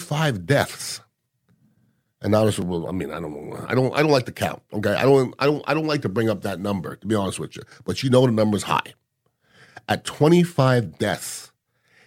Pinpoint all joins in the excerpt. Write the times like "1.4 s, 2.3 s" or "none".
none